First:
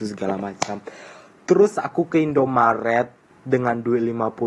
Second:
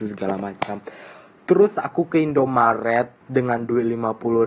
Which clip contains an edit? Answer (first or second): second